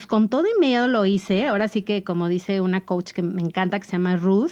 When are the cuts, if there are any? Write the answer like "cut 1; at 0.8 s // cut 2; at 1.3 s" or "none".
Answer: none

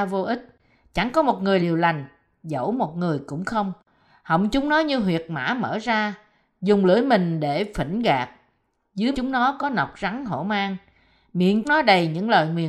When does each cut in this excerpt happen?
cut 1; at 1.6 s // cut 2; at 9.1 s // cut 3; at 11.6 s

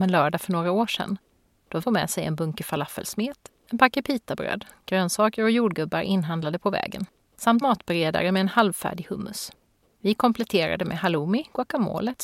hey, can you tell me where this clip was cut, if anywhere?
cut 1; at 1.8 s // cut 2; at 7.6 s

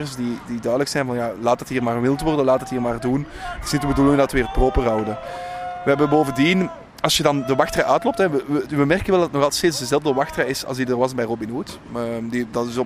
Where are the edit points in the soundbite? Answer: none

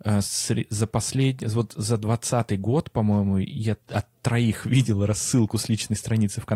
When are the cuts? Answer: cut 1; at 3.8 s

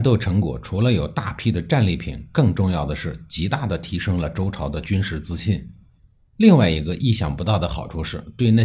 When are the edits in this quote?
none

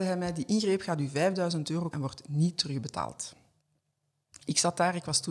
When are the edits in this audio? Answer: cut 1; at 1.9 s

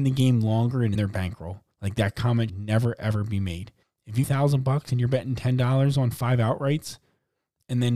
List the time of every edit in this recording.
cut 1; at 1.0 s // cut 2; at 1.7 s // cut 3; at 2.5 s // cut 4; at 3.8 s // cut 5; at 4.2 s

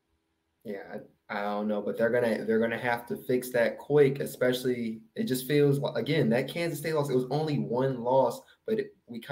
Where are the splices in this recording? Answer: cut 1; at 1.2 s

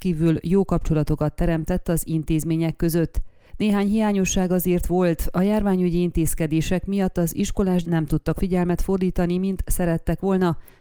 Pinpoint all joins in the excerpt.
cut 1; at 7.8 s // cut 2; at 8.4 s

